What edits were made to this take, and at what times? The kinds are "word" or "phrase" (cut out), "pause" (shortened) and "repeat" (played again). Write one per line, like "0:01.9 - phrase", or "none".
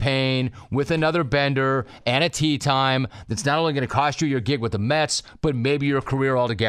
none